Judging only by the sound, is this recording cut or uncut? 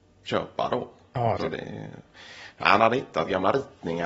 cut